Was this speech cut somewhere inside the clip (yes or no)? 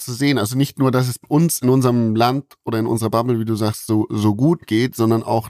no